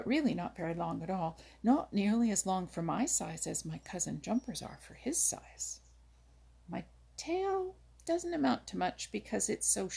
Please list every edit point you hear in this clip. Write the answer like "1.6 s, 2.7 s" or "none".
none